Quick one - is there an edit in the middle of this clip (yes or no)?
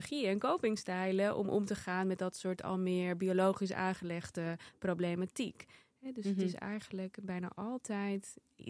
no